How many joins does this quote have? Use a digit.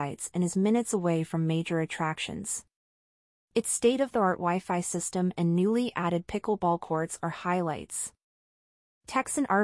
0